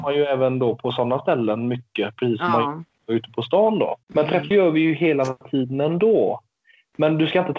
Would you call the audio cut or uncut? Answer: cut